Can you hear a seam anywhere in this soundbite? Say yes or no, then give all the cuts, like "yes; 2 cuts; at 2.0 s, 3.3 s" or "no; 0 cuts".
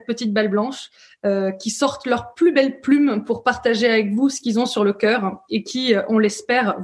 no; 0 cuts